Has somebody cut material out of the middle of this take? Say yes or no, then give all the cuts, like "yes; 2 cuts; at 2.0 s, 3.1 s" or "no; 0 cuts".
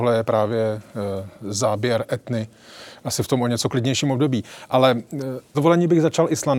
yes; 1 cut; at 5.5 s